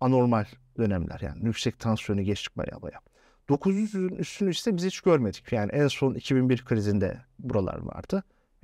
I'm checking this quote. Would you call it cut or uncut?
uncut